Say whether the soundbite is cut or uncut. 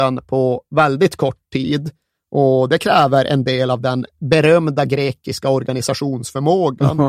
uncut